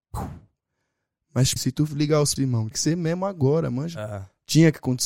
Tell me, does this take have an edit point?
yes; 4 cuts; at 1.6 s, 1.9 s, 2.4 s, 2.7 s

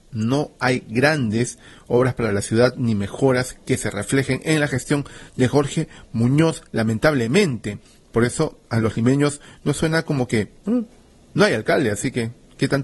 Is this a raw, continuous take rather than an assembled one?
yes; 0 cuts

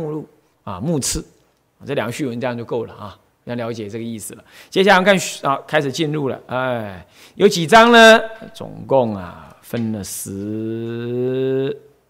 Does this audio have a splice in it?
no; 0 cuts

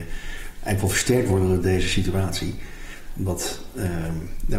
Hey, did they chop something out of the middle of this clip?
no; 0 cuts

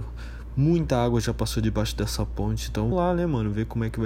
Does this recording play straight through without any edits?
no; 1 cut; at 2.9 s

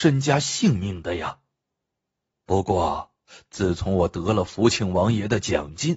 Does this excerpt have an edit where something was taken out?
no; 0 cuts

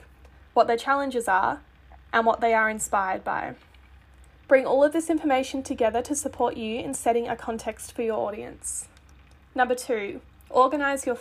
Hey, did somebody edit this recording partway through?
no; 0 cuts

